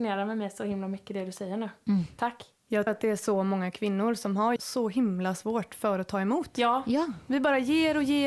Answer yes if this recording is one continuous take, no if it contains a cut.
no